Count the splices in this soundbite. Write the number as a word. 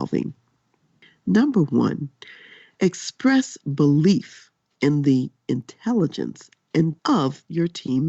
one